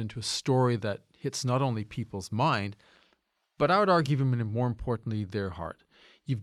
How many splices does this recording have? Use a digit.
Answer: 0